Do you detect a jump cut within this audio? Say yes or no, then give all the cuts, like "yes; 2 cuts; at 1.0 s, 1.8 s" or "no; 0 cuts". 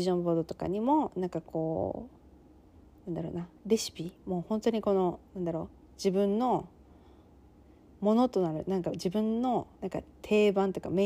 yes; 1 cut; at 9.7 s